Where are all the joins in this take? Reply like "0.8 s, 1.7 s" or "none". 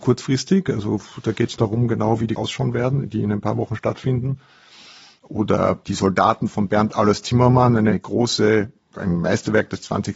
1.6 s, 2.4 s

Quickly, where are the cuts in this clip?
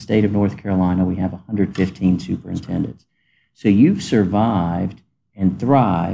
none

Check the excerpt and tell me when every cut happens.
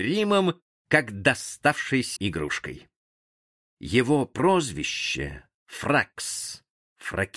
2.2 s, 5.6 s

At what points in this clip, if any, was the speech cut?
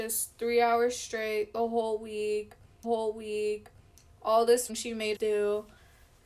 2.8 s, 4.7 s, 5.1 s

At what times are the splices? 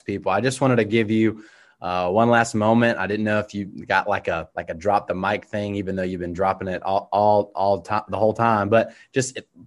4.5 s

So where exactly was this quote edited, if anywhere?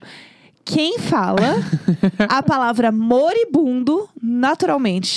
none

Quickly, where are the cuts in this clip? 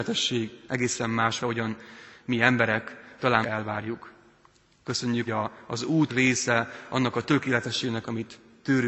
1.4 s, 3.4 s, 5.3 s, 6.1 s

